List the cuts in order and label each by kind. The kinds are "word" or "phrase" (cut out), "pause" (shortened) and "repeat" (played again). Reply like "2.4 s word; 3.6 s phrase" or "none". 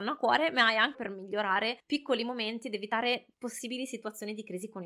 0.9 s word; 1.8 s pause; 3.3 s pause